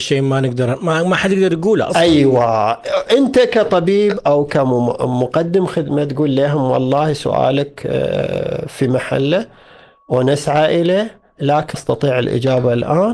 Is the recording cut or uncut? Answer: cut